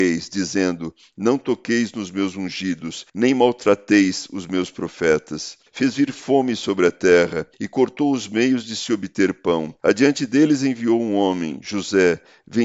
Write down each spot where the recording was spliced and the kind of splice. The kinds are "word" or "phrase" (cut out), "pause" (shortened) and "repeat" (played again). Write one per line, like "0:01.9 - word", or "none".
0:03.1 - pause
0:05.7 - pause
0:07.5 - pause
0:09.8 - pause

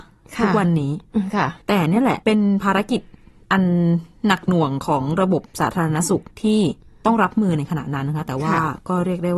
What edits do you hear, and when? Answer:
0:01.6 - pause
0:02.2 - pause
0:06.3 - pause
0:06.8 - pause

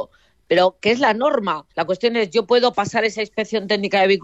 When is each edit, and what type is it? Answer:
0:01.7 - pause

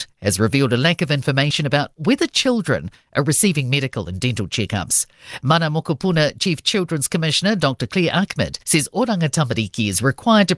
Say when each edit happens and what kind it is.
0:08.6 - pause

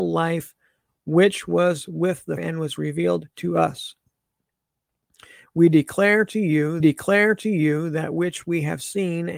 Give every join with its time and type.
0:02.4 - word
0:06.8 - repeat

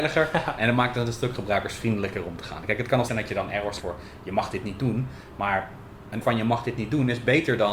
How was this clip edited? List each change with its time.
0:03.1 - word
0:03.8 - word
0:06.2 - word

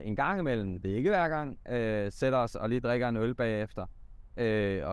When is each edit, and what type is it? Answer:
none

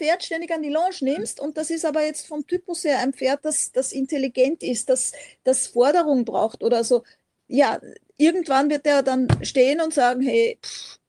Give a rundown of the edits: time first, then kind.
none

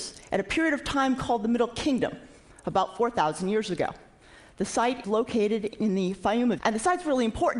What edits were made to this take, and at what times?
0:05.0 - word
0:06.6 - word

